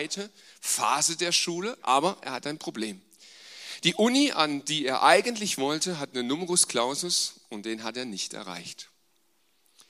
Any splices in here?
no; 0 cuts

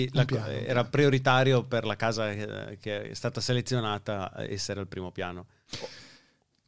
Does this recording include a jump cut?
no; 0 cuts

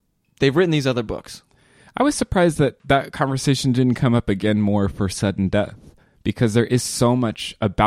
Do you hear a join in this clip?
no; 0 cuts

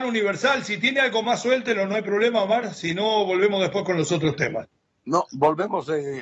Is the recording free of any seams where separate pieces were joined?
yes; 0 cuts

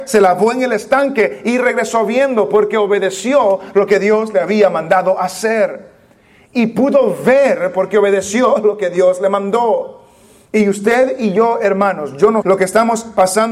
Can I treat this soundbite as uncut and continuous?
no; 1 cut; at 12.4 s

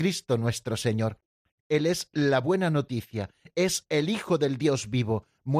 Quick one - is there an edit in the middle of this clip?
no; 0 cuts

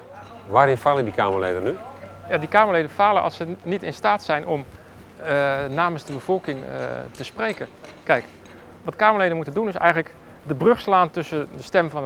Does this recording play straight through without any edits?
yes; 0 cuts

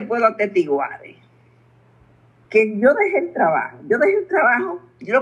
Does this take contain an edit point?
no; 0 cuts

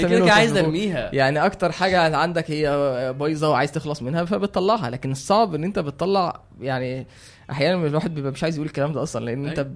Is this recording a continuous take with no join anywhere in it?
yes; 0 cuts

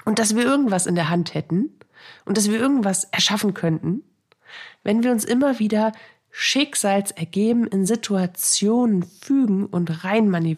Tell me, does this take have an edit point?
no; 0 cuts

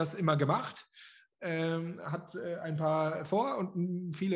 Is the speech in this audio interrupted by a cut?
no; 0 cuts

